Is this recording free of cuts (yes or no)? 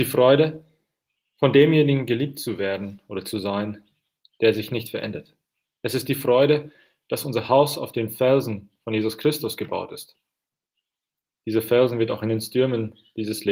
yes